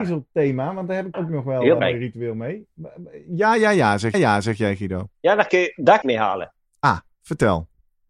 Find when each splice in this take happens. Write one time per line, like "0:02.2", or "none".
0:01.1
0:01.8
0:04.1
0:05.1
0:05.5
0:06.0